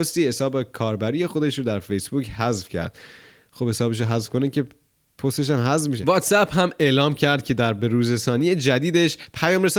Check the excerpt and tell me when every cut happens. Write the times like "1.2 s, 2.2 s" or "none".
none